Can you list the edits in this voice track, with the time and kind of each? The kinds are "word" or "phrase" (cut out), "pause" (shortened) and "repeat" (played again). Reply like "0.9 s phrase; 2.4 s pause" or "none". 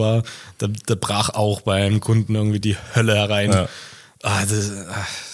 2.6 s word